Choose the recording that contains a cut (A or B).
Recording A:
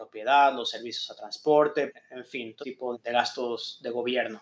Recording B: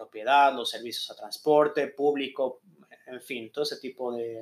A